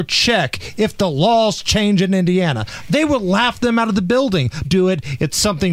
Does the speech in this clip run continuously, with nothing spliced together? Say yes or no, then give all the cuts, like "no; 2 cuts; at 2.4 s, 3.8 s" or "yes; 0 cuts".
no; 1 cut; at 4.6 s